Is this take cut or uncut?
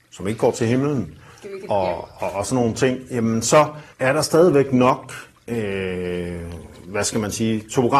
cut